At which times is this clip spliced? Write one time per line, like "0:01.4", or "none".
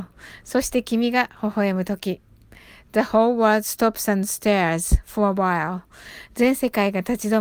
none